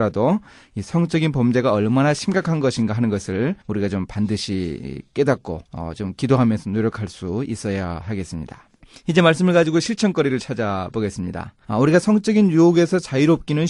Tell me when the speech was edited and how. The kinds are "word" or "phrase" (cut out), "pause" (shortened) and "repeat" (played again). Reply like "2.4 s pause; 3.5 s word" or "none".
3.6 s pause; 5.7 s pause; 8.8 s pause; 11.6 s pause